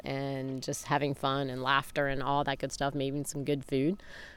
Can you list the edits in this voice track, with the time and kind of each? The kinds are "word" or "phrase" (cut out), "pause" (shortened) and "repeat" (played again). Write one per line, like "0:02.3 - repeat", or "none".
none